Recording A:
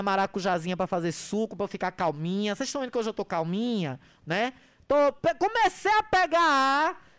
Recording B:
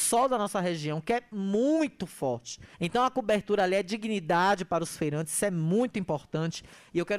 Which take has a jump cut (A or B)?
B